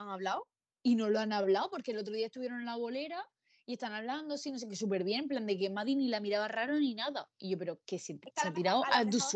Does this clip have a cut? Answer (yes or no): no